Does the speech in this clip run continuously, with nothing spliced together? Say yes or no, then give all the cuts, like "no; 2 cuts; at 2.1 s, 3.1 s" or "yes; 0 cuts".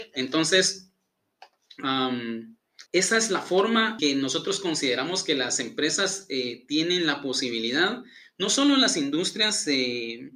no; 2 cuts; at 2.9 s, 4.0 s